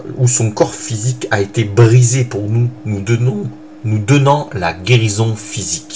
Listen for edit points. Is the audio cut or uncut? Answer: uncut